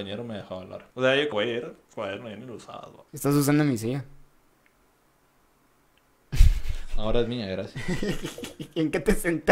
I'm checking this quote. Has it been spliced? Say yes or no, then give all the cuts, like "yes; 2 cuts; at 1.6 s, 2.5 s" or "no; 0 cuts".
yes; 3 cuts; at 0.9 s, 1.3 s, 3.1 s